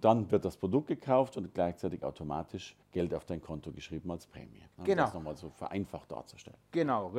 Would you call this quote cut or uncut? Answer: cut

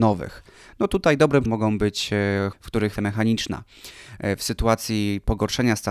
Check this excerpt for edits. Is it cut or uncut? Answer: cut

